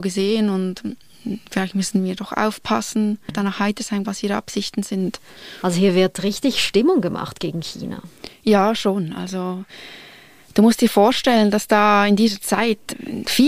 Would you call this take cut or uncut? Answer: cut